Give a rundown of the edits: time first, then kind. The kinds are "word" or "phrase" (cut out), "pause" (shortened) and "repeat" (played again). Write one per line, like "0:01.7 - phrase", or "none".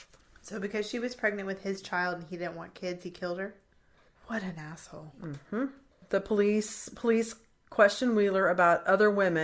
none